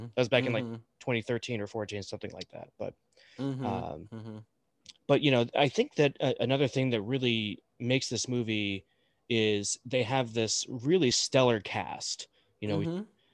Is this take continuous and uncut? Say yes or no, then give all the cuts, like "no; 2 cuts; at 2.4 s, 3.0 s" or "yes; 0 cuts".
yes; 0 cuts